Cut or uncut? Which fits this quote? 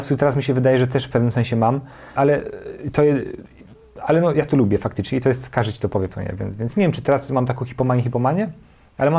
cut